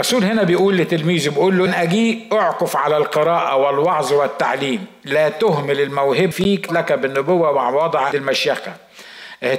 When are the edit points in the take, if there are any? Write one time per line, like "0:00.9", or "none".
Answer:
0:01.7
0:06.3
0:06.7
0:08.1